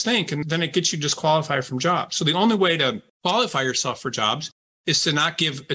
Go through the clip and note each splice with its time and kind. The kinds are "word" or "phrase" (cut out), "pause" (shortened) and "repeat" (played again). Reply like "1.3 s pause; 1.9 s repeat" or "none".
none